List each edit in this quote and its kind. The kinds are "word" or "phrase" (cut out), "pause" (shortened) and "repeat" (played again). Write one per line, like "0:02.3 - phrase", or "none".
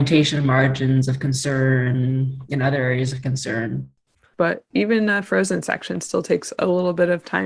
none